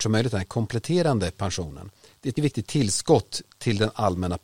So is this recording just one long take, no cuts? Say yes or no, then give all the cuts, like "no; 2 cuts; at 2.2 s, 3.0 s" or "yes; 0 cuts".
no; 1 cut; at 2.4 s